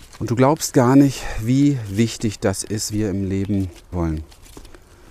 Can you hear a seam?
yes; 2 cuts; at 2.9 s, 3.9 s

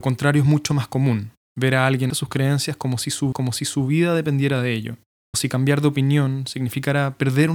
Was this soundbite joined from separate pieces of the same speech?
yes; 3 cuts; at 2.1 s, 3.3 s, 5.3 s

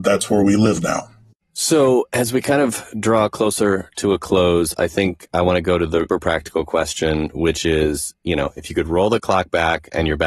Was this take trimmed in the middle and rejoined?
yes; 1 cut; at 6.1 s

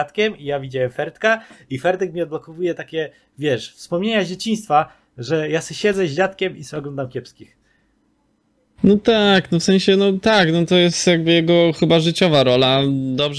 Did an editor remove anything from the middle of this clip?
no; 0 cuts

